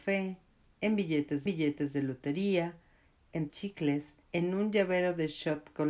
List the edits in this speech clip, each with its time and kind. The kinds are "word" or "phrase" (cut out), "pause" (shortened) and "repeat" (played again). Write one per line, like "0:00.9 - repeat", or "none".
0:01.5 - repeat
0:03.5 - phrase
0:04.2 - pause